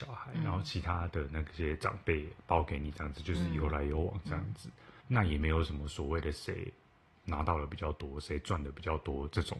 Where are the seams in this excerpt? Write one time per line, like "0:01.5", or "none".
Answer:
0:05.0